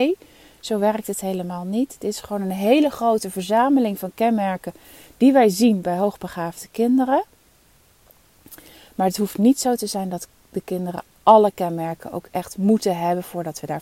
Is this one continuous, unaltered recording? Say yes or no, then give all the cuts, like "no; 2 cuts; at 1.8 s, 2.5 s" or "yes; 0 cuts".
yes; 0 cuts